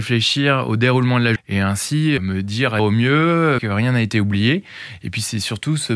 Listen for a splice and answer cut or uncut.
cut